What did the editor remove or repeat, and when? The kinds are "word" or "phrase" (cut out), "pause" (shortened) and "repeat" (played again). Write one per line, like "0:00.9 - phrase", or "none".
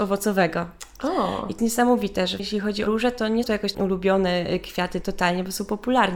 0:01.6 - word
0:02.4 - word
0:02.9 - word
0:03.4 - word
0:03.7 - word
0:05.0 - word